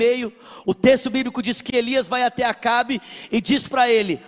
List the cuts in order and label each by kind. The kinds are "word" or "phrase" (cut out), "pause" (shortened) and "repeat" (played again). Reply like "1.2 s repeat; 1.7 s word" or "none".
none